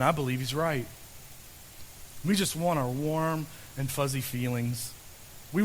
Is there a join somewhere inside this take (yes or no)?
no